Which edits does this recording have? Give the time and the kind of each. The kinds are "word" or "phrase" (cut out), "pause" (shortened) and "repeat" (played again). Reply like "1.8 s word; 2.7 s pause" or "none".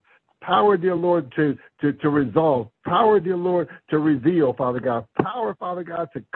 none